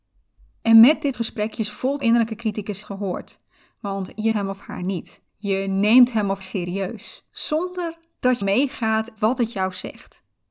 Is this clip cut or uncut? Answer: cut